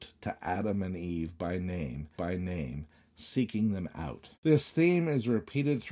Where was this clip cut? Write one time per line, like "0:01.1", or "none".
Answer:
0:02.2
0:04.3